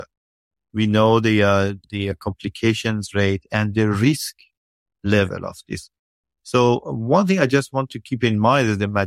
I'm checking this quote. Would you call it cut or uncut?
uncut